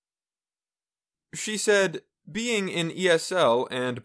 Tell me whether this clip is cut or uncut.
uncut